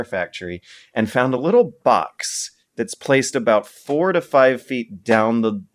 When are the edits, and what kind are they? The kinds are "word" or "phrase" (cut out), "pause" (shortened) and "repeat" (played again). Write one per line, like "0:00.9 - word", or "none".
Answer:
none